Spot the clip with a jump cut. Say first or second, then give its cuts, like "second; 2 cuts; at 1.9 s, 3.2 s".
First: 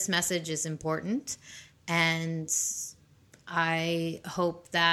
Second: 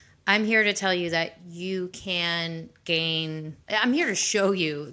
second; 1 cut; at 3.6 s